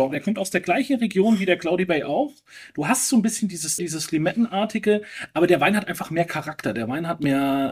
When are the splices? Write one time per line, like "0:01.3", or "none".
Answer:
0:03.8